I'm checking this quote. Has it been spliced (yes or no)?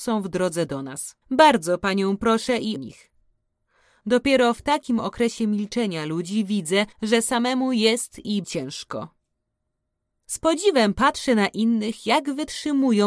yes